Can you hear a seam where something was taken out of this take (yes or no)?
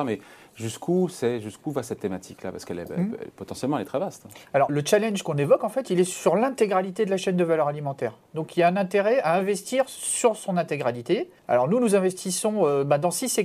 yes